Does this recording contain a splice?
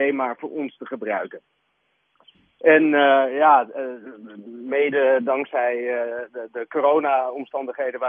no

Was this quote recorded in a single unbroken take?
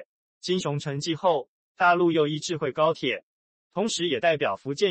yes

